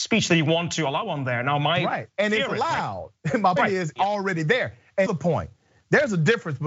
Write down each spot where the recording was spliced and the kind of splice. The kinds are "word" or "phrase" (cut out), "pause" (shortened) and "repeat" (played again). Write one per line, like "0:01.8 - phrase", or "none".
0:03.6 - word
0:04.0 - word
0:05.1 - phrase